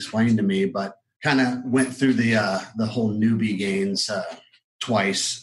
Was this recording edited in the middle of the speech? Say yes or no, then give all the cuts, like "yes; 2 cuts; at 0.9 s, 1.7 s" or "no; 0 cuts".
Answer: no; 0 cuts